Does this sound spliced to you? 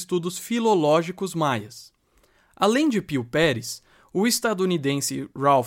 no; 0 cuts

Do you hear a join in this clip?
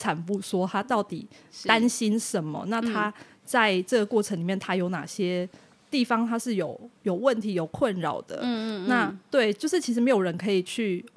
no; 0 cuts

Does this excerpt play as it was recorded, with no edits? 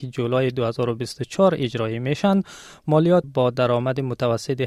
no; 1 cut; at 3.2 s

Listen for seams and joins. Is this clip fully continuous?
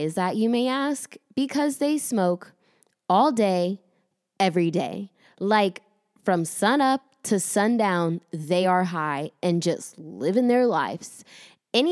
yes; 0 cuts

